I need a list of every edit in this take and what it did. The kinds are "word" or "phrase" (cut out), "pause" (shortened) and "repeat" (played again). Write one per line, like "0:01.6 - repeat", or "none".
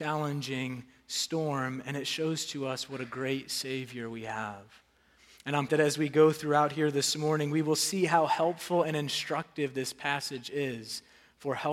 0:05.7 - word